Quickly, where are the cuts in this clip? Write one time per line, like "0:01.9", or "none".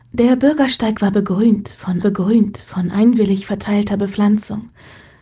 0:02.0